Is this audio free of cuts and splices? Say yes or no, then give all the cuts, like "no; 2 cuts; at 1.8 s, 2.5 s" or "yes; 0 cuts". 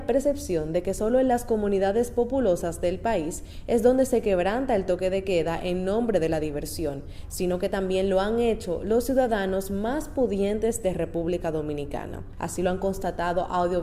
yes; 0 cuts